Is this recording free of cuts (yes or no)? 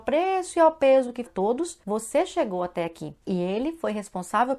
no